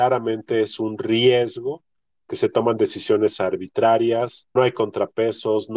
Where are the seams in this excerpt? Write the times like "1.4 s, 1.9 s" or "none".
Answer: 2.3 s, 4.6 s